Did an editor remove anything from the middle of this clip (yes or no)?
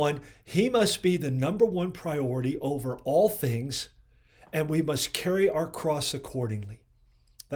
no